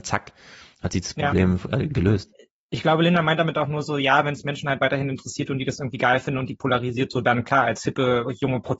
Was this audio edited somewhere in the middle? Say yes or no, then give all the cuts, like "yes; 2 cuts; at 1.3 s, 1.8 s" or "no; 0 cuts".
no; 0 cuts